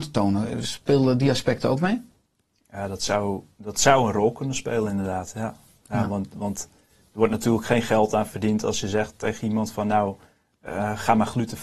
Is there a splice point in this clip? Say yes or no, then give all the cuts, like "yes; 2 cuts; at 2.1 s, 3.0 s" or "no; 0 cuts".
no; 0 cuts